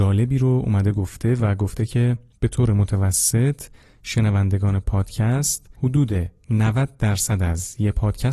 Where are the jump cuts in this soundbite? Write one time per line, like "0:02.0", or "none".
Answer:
0:05.7

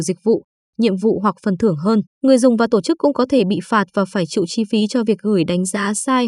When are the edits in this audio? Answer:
0:02.1

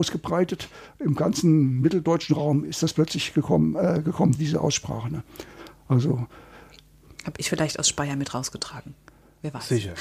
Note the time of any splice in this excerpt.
0:04.3

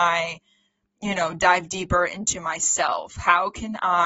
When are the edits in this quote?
none

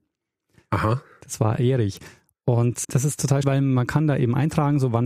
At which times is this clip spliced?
0:01.6
0:02.8
0:03.4

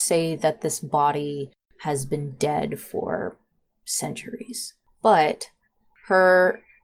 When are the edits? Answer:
none

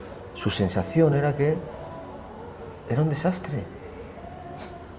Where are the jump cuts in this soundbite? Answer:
none

